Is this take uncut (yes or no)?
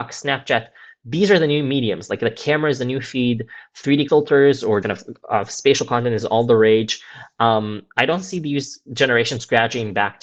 no